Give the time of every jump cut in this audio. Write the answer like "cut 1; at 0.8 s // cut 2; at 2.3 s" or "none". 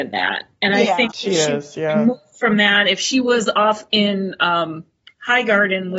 none